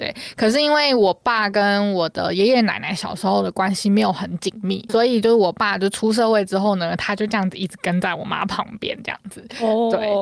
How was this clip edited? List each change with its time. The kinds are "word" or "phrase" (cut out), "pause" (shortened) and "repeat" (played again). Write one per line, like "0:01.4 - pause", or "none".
0:04.9 - word